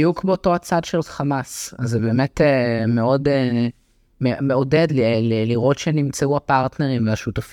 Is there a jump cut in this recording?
no; 0 cuts

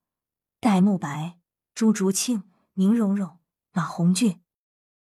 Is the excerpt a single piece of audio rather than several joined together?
yes; 0 cuts

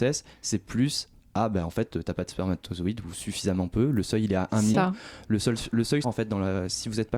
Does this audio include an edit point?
yes; 3 cuts; at 1.2 s, 4.7 s, 6.0 s

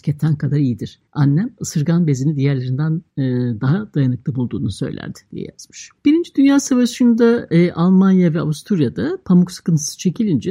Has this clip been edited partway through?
yes; 3 cuts; at 1.1 s, 3.1 s, 6.0 s

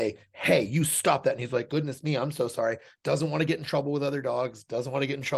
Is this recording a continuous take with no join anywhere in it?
yes; 0 cuts

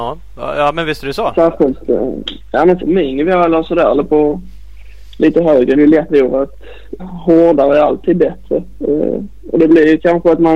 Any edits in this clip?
yes; 4 cuts; at 2.8 s, 5.7 s, 6.1 s, 7.0 s

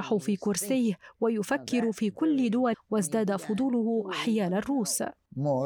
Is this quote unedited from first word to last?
no; 1 cut; at 2.7 s

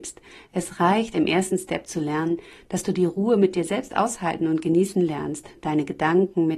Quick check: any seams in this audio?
no; 0 cuts

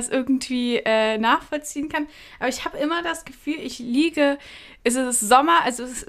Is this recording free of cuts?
yes; 0 cuts

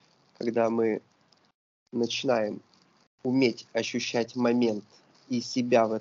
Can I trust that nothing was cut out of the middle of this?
yes; 0 cuts

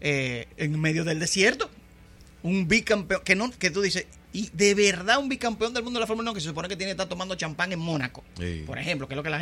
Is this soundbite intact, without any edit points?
yes; 0 cuts

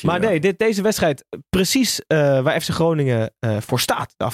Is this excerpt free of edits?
yes; 0 cuts

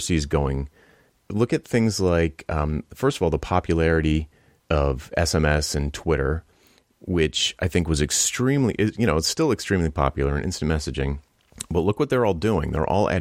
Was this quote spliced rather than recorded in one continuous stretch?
no; 0 cuts

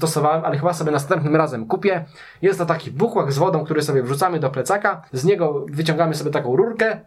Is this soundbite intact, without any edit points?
no; 1 cut; at 5.1 s

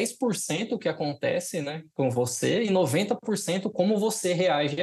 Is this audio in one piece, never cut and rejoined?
yes; 0 cuts

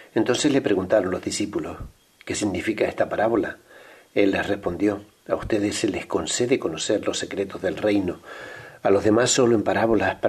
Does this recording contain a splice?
no; 0 cuts

